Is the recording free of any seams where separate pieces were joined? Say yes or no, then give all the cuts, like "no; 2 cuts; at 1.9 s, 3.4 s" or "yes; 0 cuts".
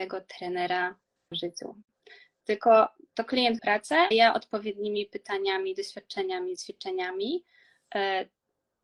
no; 4 cuts; at 1.3 s, 3.6 s, 4.1 s, 6.6 s